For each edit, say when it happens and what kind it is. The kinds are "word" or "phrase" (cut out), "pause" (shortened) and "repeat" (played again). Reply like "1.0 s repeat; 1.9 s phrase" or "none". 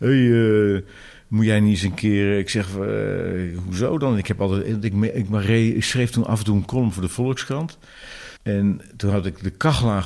8.4 s pause